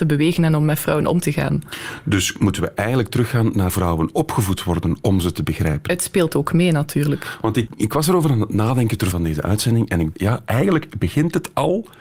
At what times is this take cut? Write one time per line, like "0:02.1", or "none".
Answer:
0:03.7
0:07.7
0:09.1
0:10.1